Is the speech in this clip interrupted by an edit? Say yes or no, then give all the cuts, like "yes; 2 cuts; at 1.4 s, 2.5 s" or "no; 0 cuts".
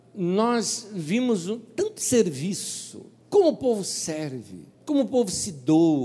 yes; 2 cuts; at 3.2 s, 4.7 s